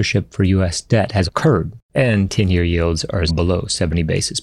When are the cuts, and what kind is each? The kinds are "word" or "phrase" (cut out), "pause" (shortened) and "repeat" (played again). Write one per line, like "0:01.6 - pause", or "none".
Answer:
0:01.3 - word
0:03.3 - word

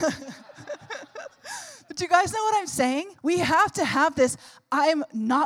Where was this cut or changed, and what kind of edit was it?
0:03.2 - pause

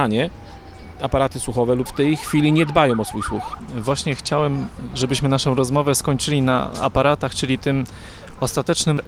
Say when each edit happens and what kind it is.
0:01.9 - phrase

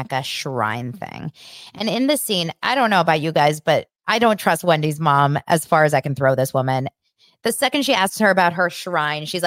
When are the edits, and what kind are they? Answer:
none

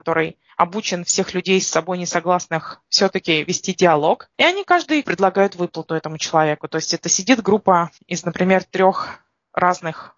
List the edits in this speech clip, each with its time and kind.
0:04.3 - pause
0:05.0 - word
0:08.0 - pause

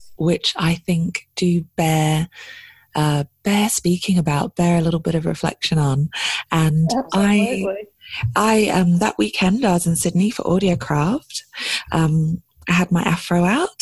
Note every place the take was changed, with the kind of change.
0:01.3 - pause

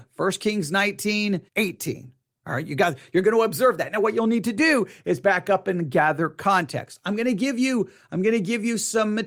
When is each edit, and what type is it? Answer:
0:01.5 - pause

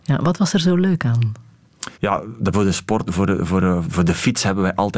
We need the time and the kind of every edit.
0:01.9 - pause
0:02.5 - word
0:03.1 - word
0:03.8 - word

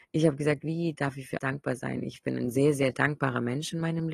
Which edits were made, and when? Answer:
0:01.4 - word
0:02.2 - word

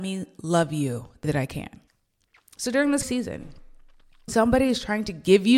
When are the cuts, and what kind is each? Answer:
0:01.2 - word
0:01.9 - pause
0:03.0 - word
0:04.3 - word

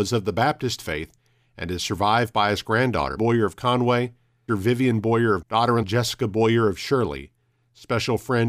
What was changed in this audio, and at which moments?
0:03.2 - word
0:04.5 - word
0:05.4 - word
0:05.8 - word

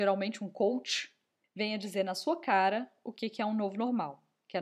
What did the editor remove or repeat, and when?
0:01.4 - pause

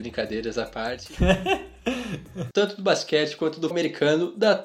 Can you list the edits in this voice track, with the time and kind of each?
0:02.5 - phrase
0:03.7 - word

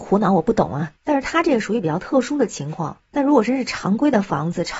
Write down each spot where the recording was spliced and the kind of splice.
0:01.0 - pause

